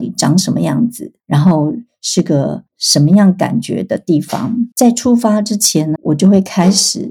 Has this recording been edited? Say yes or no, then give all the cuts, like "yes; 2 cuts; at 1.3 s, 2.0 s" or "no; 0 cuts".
yes; 3 cuts; at 1.2 s, 4.7 s, 6.0 s